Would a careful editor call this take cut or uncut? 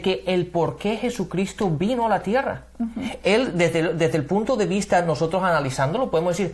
uncut